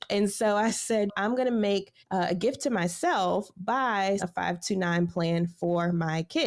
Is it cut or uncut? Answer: cut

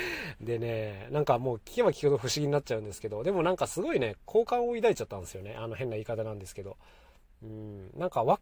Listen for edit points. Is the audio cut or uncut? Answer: uncut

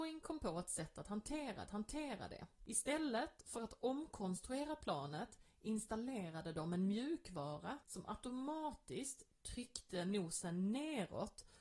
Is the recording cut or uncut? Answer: cut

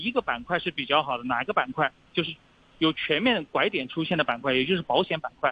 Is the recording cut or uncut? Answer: uncut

